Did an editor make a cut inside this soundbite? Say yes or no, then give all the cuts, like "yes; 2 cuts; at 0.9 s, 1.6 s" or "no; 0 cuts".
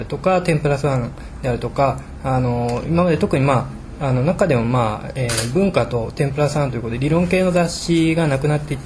no; 0 cuts